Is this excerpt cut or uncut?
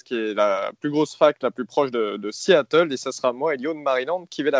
uncut